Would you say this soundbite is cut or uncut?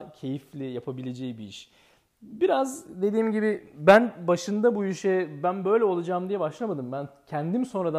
uncut